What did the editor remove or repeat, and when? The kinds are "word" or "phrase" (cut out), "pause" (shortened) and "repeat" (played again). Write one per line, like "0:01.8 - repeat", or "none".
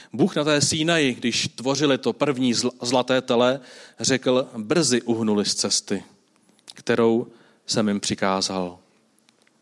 none